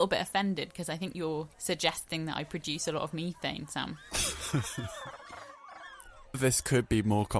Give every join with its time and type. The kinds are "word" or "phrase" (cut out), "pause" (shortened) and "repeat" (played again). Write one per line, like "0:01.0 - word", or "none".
0:01.5 - pause
0:06.3 - word